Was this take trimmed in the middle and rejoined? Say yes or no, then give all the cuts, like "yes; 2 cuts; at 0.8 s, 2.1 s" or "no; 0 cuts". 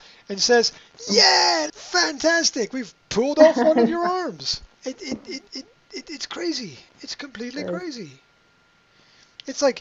yes; 4 cuts; at 1.7 s, 4.7 s, 5.5 s, 6.9 s